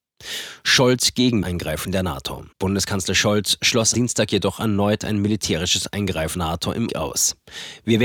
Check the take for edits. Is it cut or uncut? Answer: cut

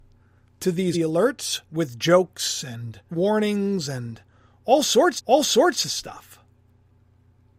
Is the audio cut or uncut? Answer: cut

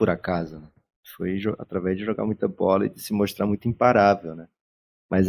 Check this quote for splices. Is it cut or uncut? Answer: uncut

